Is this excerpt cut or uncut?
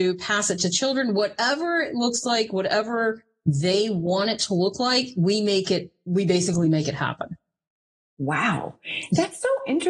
uncut